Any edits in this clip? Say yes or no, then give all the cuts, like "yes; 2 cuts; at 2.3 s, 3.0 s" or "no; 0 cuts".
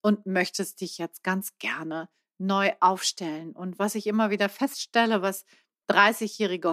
no; 0 cuts